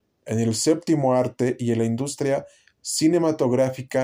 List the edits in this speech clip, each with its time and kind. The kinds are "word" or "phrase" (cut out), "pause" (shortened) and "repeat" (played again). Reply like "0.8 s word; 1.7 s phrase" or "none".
none